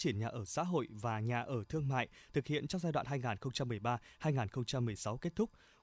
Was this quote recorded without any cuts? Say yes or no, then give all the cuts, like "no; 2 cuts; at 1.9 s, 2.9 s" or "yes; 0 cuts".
yes; 0 cuts